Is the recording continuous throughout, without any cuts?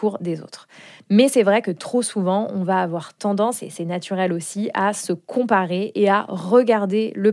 yes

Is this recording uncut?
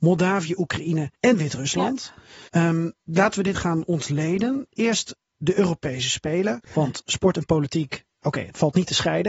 no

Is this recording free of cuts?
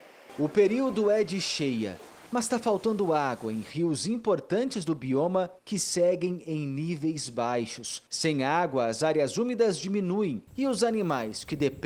no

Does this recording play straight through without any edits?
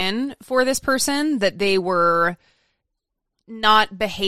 yes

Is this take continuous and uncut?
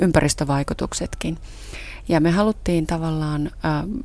yes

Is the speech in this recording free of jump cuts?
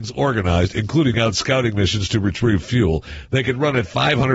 no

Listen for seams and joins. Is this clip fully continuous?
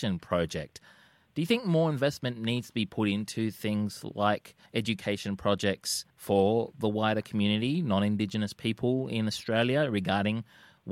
no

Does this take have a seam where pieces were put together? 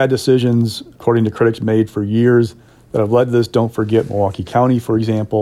no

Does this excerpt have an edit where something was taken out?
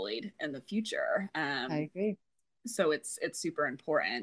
no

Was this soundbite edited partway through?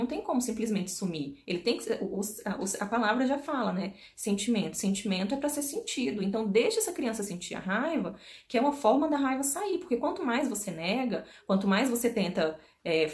no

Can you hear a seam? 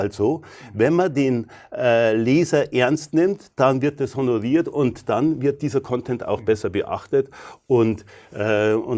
no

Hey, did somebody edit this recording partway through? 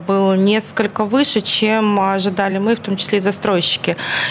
no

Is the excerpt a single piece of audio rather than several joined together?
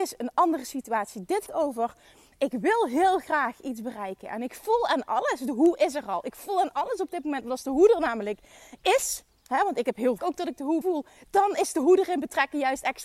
no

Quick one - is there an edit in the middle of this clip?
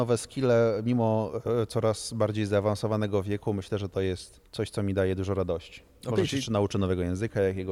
yes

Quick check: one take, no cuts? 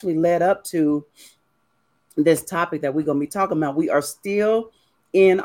yes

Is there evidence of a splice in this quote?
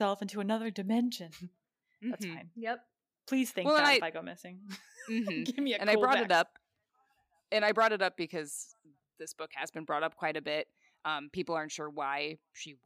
no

